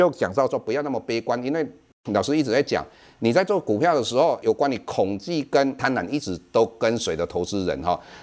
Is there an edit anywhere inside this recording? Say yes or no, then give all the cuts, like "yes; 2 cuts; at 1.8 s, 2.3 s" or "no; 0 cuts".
no; 0 cuts